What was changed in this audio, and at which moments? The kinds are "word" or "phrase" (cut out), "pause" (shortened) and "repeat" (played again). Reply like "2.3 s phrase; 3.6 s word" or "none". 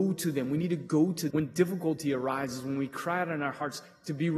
1.3 s word

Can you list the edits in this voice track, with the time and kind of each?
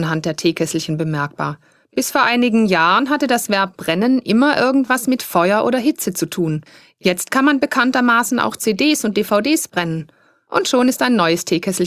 none

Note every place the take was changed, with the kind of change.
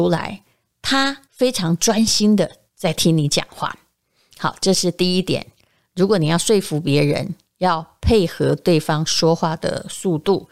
1.2 s pause; 2.7 s pause; 7.5 s pause

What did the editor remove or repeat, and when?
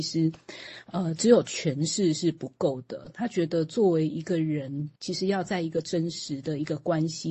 5.0 s pause

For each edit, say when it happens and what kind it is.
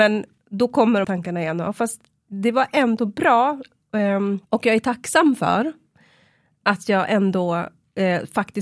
1.0 s word; 4.5 s pause

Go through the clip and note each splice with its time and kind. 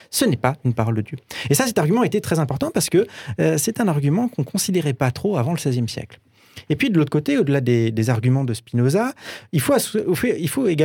none

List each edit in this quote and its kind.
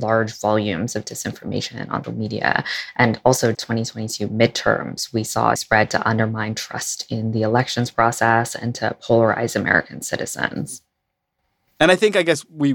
2.0 s word; 3.5 s phrase; 5.6 s phrase

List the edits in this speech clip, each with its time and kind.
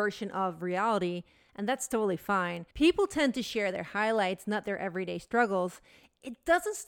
2.7 s pause

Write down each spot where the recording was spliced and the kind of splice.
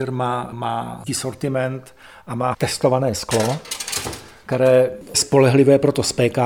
1.1 s word; 2.5 s word; 5.1 s word

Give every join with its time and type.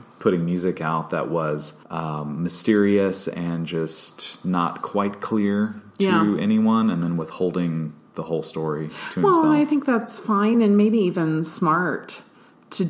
none

